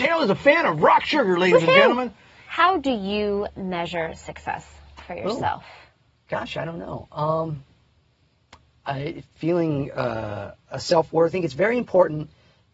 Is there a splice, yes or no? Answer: yes